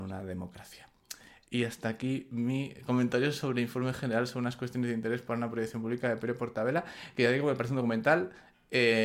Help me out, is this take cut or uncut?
uncut